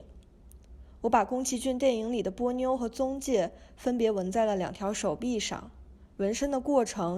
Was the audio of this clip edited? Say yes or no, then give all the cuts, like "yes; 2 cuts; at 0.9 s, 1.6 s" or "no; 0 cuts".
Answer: yes; 1 cut; at 6.1 s